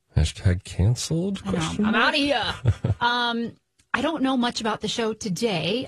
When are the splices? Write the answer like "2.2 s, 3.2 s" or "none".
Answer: none